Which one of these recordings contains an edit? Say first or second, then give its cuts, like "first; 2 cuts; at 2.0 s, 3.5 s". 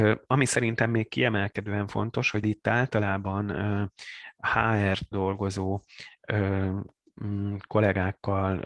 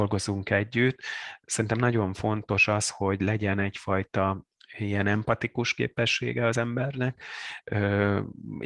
first; 2 cuts; at 2.4 s, 5.1 s